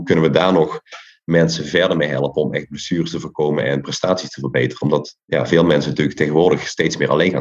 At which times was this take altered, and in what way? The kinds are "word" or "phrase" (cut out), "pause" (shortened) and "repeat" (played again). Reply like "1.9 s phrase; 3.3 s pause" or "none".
none

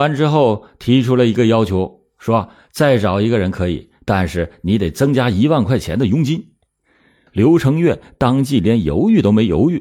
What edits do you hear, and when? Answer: none

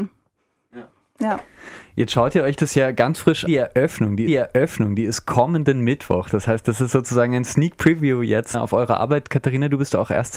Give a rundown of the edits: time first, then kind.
3.5 s word; 4.3 s repeat; 8.5 s word

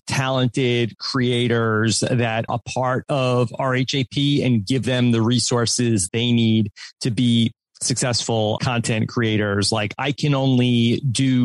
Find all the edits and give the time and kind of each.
2.5 s word; 6.1 s word; 8.6 s word

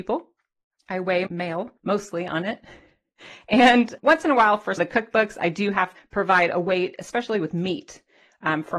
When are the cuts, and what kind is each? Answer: 1.3 s word; 1.8 s pause; 4.0 s word; 4.8 s phrase; 6.0 s word

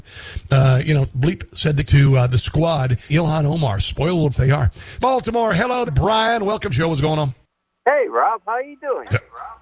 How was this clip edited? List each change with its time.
1.1 s word; 1.8 s word; 3.1 s word; 4.3 s word; 5.0 s phrase; 5.9 s word; 6.7 s phrase; 7.5 s pause

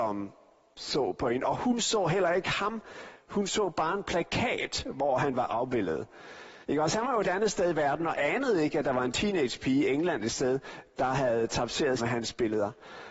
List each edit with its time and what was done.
6.6 s pause; 7.2 s word; 12.0 s phrase

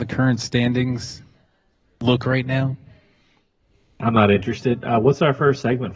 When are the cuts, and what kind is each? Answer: none

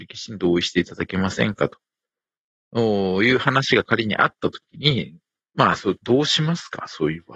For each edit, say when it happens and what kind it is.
none

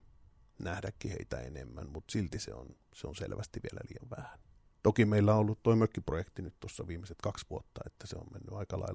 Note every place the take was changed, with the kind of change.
4.6 s pause

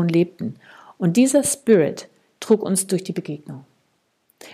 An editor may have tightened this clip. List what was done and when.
none

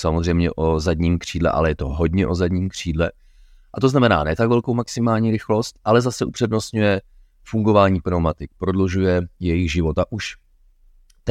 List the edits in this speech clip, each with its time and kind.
none

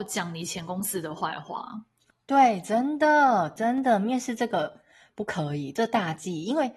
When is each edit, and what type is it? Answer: none

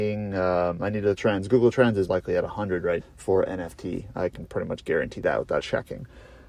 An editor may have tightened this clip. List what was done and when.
1.2 s phrase; 2.1 s word; 3.0 s word; 5.6 s word

